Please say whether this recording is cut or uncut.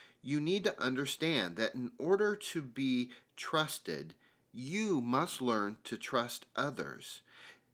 uncut